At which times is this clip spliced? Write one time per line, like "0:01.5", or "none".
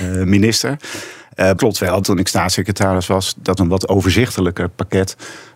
0:01.6
0:02.0
0:03.6